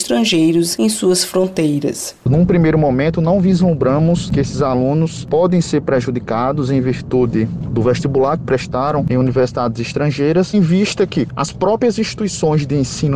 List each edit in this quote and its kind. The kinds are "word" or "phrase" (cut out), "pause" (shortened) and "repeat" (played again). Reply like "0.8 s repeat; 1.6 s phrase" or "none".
10.5 s word